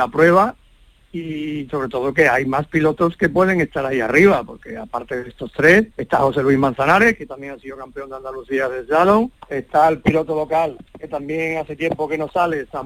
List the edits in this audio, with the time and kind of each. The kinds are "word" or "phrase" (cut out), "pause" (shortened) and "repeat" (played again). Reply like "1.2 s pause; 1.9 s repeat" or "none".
5.9 s pause; 9.4 s pause; 10.9 s pause